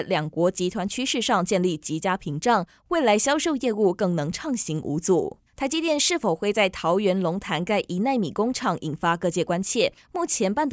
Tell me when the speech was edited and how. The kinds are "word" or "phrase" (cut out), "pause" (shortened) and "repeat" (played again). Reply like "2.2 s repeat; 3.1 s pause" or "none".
5.5 s pause

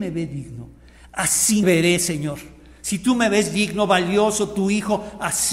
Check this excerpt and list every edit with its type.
1.6 s word

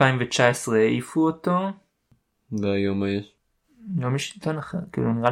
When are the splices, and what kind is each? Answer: none

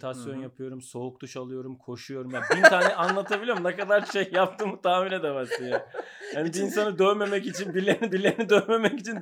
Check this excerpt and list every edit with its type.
4.1 s word; 8.1 s repeat

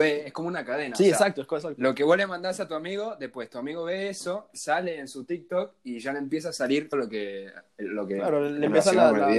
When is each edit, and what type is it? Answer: 6.9 s word

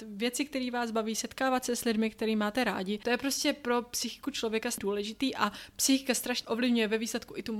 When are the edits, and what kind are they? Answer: 6.4 s word

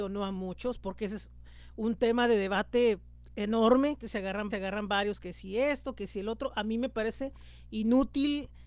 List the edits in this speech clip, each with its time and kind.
4.0 s phrase; 4.5 s repeat

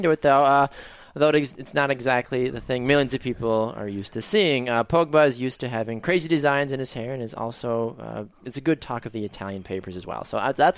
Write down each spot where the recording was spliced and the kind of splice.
none

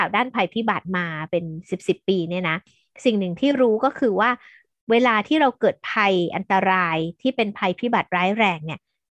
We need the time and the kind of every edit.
none

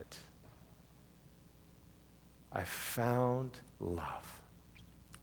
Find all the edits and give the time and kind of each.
3.7 s pause

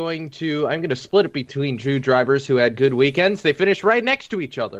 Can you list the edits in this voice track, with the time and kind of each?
none

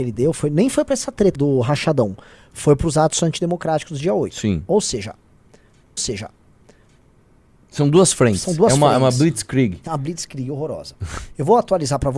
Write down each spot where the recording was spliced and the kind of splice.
1.3 s word; 6.0 s repeat

